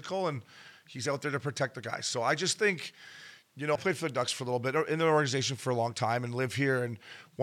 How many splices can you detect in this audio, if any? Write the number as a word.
one